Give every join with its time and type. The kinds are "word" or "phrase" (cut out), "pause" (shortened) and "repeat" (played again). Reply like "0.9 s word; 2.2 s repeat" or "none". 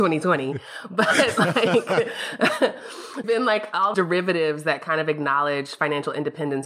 3.2 s word; 3.9 s word